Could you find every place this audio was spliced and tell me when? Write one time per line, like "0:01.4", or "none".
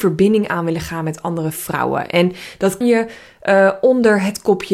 0:02.8